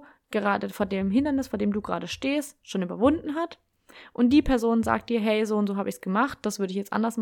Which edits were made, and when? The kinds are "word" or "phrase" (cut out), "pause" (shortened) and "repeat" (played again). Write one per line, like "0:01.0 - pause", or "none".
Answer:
none

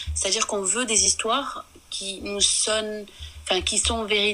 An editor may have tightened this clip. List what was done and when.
none

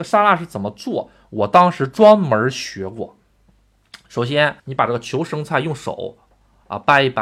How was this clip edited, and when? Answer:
0:04.6 - pause

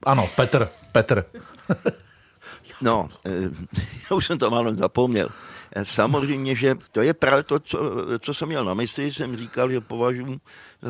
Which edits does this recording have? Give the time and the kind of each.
0:06.9 - pause

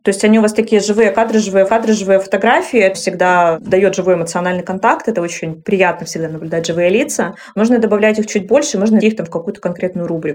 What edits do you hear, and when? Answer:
0:01.7 - repeat
0:02.9 - word
0:09.0 - word

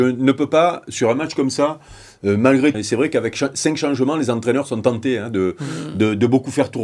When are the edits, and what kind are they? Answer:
0:02.7 - phrase

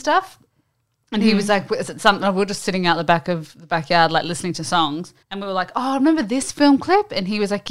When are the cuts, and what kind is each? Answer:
0:05.2 - pause

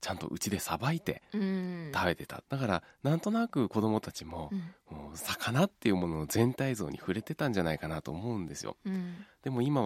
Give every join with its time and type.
0:02.5 - pause

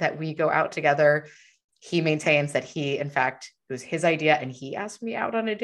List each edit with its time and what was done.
none

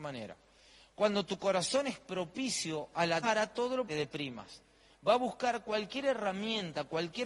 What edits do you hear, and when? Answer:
0:03.2 - phrase
0:03.9 - phrase

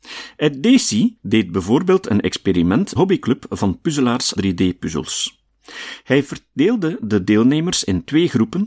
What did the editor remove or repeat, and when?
0:01.2 - pause
0:03.0 - phrase
0:04.4 - word

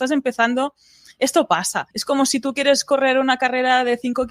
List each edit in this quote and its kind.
0:01.9 - pause

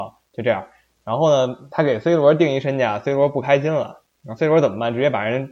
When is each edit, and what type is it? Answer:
none

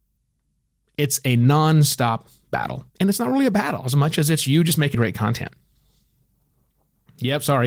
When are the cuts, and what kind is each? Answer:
0:02.9 - pause
0:04.9 - word

